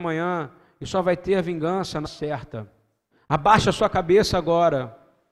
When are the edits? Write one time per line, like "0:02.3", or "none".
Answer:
0:02.0
0:03.1